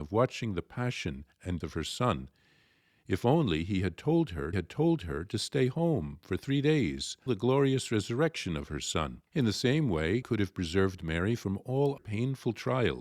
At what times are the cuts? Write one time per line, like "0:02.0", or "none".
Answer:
0:01.6
0:04.5
0:07.3
0:09.3
0:10.2
0:12.0

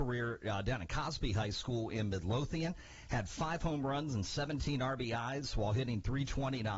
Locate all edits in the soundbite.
none

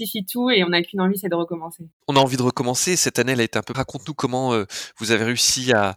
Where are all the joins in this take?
0:03.7

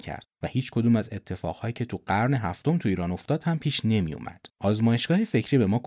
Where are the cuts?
0:04.5

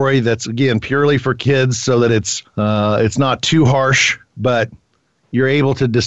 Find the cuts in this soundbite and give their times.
0:02.4

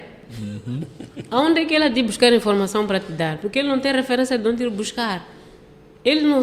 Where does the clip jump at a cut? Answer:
none

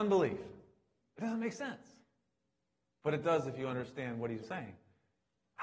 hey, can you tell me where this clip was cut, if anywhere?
0:04.4

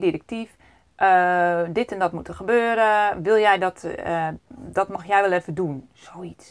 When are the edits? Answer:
0:04.4

